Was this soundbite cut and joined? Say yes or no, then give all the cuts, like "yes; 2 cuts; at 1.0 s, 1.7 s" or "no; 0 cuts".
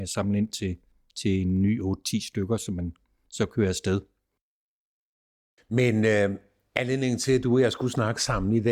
no; 0 cuts